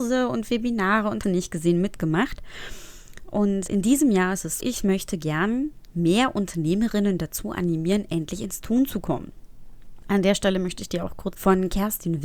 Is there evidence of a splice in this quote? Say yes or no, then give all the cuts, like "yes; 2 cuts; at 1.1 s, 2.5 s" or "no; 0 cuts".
yes; 4 cuts; at 1.2 s, 3.7 s, 4.6 s, 11.3 s